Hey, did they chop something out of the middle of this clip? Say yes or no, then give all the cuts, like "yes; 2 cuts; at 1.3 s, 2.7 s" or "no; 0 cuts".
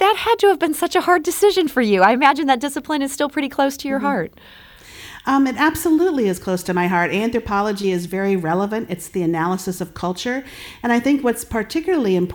no; 0 cuts